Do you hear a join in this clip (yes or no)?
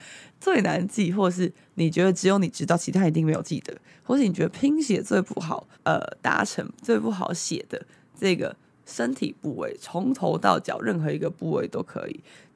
yes